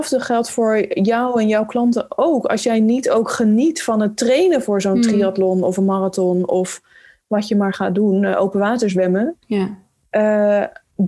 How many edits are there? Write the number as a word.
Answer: one